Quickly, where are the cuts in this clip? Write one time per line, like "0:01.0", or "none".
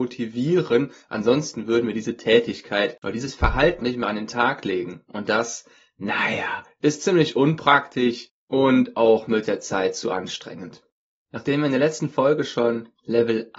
0:03.8